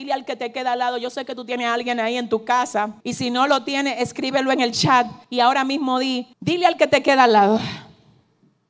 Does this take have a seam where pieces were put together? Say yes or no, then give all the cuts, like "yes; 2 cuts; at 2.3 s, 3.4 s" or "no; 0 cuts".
yes; 3 cuts; at 3.0 s, 5.2 s, 6.3 s